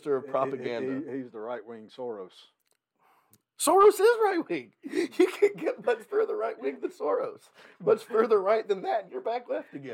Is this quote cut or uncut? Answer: uncut